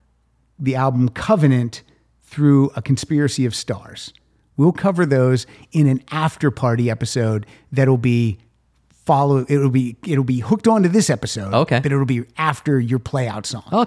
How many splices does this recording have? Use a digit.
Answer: 0